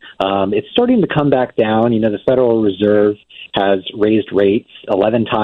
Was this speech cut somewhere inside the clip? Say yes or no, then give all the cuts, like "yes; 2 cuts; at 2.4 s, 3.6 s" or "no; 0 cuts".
no; 0 cuts